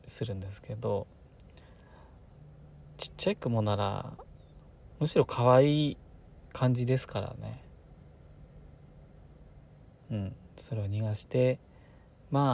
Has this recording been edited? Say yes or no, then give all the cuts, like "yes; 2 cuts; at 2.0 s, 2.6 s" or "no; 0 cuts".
no; 0 cuts